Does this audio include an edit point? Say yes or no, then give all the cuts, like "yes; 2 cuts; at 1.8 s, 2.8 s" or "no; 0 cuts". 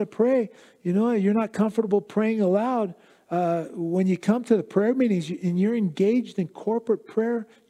no; 0 cuts